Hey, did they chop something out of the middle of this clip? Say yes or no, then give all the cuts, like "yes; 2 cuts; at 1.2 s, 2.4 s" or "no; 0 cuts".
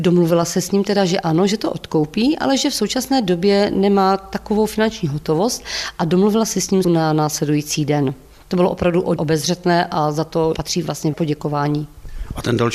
yes; 4 cuts; at 6.8 s, 9.2 s, 10.5 s, 11.1 s